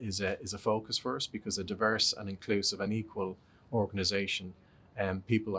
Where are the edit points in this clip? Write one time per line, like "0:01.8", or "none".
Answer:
none